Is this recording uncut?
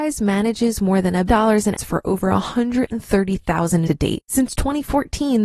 no; 4 cuts; at 1.3 s, 1.8 s, 3.9 s, 4.2 s

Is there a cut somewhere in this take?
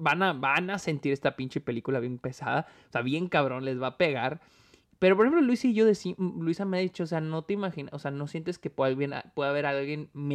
no; 0 cuts

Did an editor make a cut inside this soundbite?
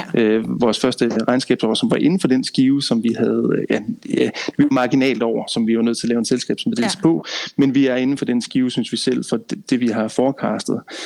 no; 0 cuts

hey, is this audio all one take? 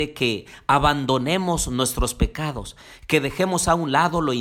yes; 0 cuts

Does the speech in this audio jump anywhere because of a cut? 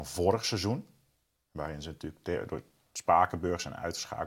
no; 0 cuts

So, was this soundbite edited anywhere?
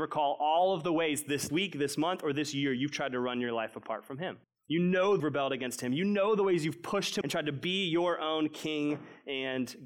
yes; 4 cuts; at 1.5 s, 4.4 s, 5.2 s, 7.2 s

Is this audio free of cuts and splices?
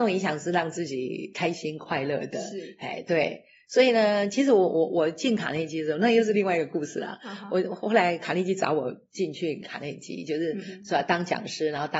yes; 0 cuts

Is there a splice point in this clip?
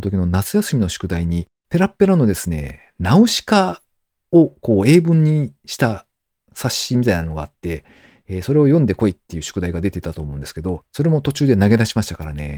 no; 0 cuts

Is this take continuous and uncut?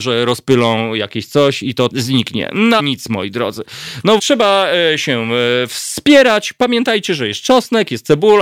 no; 3 cuts; at 1.9 s, 2.8 s, 4.2 s

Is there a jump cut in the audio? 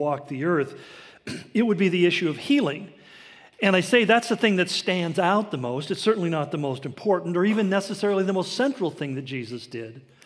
no; 0 cuts

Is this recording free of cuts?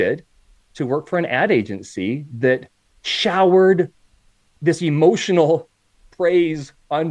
yes; 0 cuts

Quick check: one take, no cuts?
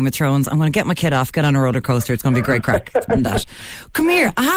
no; 1 cut; at 3.1 s

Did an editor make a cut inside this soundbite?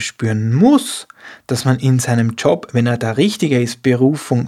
no; 0 cuts

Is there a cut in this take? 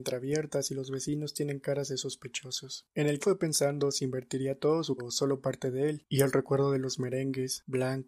yes; 2 cuts; at 3.2 s, 5.0 s

